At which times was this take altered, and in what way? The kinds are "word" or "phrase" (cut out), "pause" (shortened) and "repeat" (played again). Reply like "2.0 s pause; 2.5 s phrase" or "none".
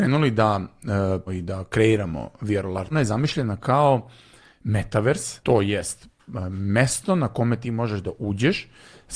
1.3 s word; 2.9 s word; 5.4 s word